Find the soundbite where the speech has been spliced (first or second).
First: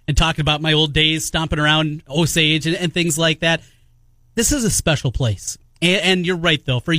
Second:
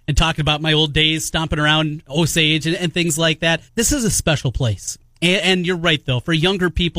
second